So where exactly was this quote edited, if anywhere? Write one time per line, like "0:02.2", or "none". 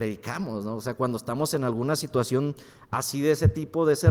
none